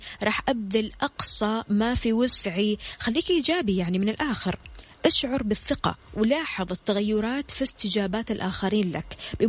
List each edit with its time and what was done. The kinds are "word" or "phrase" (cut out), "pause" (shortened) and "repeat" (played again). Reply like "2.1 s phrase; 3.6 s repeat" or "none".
none